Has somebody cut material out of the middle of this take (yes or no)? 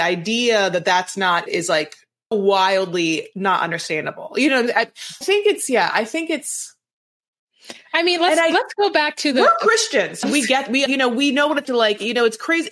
yes